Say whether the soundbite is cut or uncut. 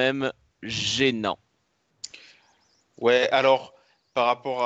uncut